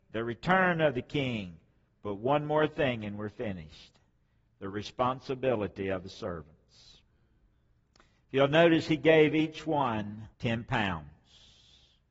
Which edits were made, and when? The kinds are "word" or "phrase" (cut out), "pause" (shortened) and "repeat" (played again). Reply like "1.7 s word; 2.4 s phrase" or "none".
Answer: 10.3 s pause